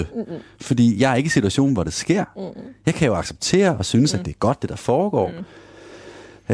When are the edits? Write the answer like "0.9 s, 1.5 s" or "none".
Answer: none